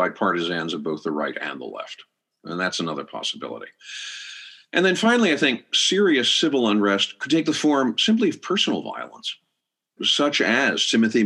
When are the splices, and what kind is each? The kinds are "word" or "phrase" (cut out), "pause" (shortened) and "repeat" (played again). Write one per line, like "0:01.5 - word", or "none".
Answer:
0:10.0 - word